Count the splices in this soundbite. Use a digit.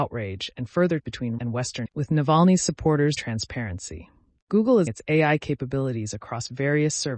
5